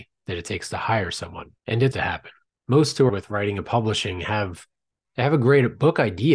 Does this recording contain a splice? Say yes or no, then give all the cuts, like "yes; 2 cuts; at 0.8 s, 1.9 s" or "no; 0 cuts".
yes; 4 cuts; at 1.6 s, 1.9 s, 2.5 s, 3.1 s